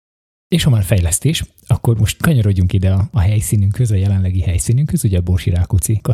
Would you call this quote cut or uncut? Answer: uncut